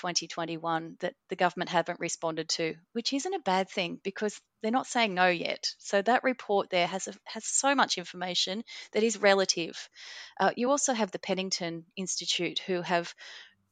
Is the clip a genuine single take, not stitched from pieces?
yes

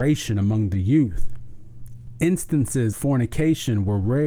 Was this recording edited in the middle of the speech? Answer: yes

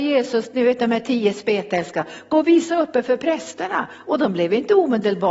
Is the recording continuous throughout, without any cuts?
yes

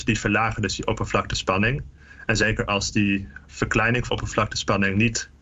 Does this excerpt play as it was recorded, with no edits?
no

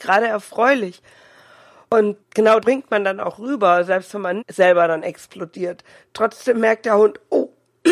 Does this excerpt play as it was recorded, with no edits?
no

